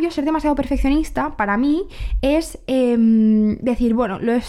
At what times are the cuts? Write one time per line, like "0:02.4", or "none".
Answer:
none